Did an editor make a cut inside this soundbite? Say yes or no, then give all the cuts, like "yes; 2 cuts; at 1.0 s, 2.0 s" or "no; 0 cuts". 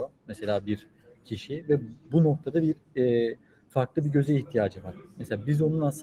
no; 0 cuts